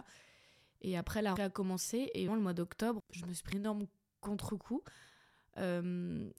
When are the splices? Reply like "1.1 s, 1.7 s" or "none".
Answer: 1.4 s, 2.3 s, 3.0 s, 3.5 s